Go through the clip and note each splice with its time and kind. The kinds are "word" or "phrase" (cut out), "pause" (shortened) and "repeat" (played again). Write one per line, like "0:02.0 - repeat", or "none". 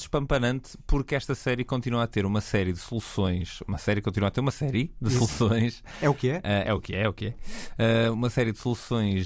none